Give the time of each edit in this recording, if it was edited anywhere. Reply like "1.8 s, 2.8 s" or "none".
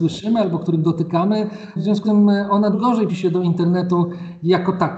2.0 s, 2.7 s, 3.1 s